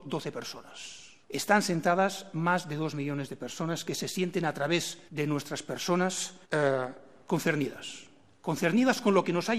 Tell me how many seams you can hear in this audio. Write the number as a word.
three